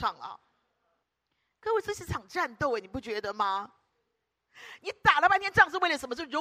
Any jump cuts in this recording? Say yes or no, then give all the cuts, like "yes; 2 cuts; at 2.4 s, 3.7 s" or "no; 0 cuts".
yes; 1 cut; at 1.0 s